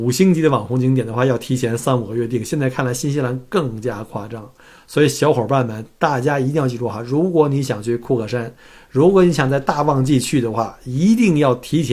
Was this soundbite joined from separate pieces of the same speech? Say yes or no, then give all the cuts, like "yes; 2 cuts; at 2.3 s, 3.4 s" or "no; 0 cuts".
no; 0 cuts